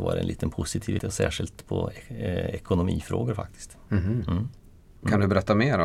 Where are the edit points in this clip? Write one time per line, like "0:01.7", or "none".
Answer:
0:01.0